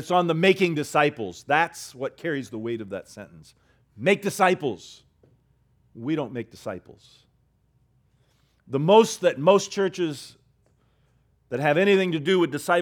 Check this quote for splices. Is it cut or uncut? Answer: uncut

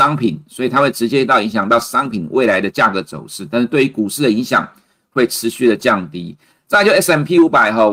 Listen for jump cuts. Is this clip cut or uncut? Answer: uncut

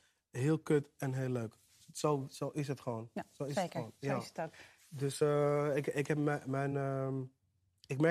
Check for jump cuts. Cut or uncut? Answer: uncut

